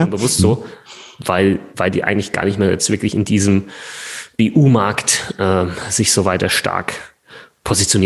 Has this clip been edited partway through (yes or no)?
no